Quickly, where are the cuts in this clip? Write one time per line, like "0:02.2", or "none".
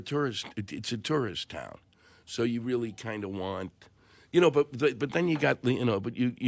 none